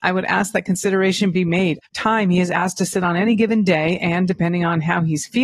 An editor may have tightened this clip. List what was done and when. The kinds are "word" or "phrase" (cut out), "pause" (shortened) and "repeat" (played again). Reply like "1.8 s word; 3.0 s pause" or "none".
1.9 s phrase